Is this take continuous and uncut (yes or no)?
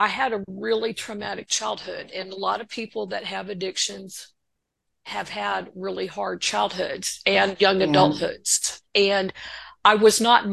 yes